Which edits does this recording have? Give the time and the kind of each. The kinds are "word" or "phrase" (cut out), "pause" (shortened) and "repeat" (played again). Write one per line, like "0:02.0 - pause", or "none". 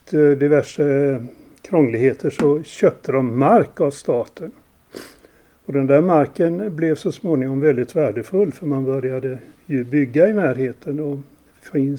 none